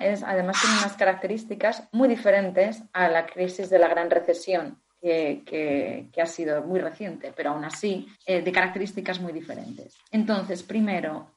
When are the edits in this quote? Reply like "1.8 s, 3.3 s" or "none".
8.1 s, 10.1 s